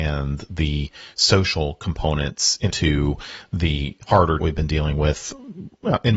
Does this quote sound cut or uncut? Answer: cut